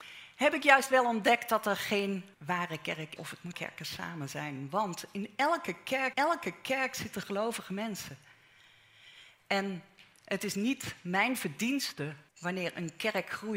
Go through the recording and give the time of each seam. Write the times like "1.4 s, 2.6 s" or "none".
2.3 s, 3.2 s, 3.5 s, 6.1 s, 12.3 s